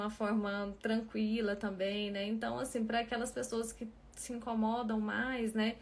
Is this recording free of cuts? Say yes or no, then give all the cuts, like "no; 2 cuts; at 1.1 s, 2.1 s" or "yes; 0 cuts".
yes; 0 cuts